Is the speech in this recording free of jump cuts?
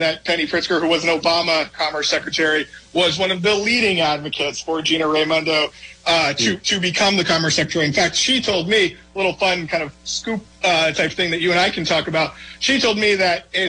yes; 0 cuts

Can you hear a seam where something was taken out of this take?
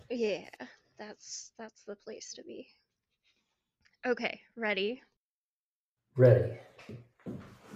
no; 0 cuts

